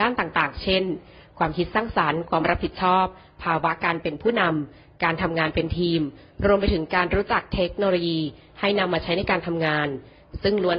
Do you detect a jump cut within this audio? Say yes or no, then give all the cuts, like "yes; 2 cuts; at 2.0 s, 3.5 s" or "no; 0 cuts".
no; 0 cuts